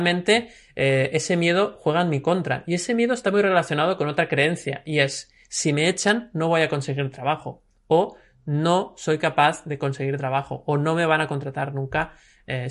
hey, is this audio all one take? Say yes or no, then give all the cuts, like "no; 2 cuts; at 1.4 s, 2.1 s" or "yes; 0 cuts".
yes; 0 cuts